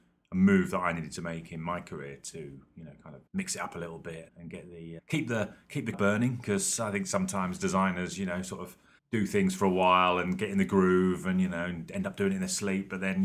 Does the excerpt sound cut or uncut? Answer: cut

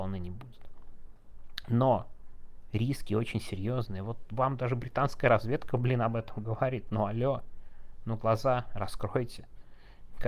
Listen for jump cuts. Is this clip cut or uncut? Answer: uncut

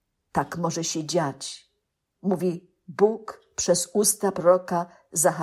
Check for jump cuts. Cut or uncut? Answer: uncut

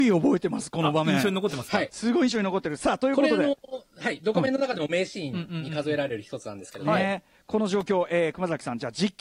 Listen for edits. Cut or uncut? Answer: uncut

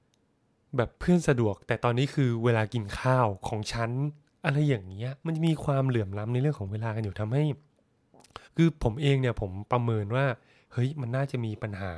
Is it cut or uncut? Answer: cut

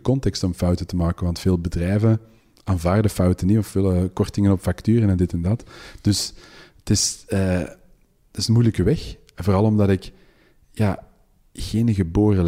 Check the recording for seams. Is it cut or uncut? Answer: uncut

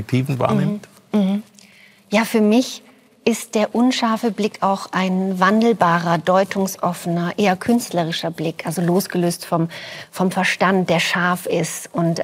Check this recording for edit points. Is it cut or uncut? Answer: uncut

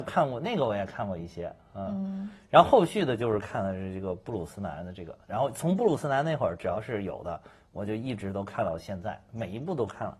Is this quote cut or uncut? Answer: uncut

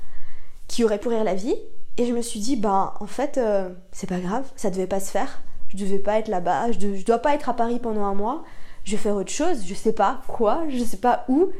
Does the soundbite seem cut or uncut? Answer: cut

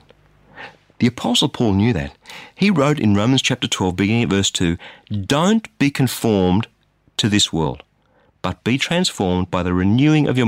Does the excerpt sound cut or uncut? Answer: uncut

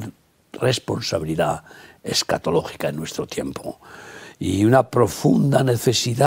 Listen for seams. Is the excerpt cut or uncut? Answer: uncut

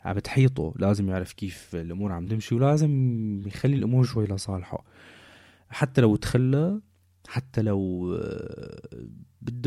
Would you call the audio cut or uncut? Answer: uncut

